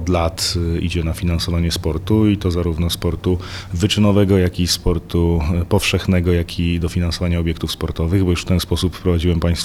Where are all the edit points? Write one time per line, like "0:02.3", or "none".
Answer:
none